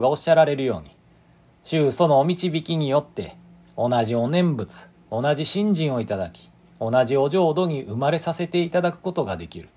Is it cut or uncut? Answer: uncut